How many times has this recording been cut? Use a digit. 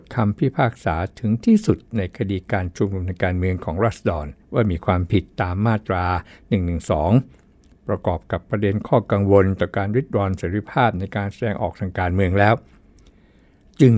1